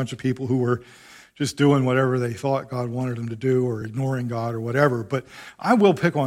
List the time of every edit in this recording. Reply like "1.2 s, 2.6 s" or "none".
none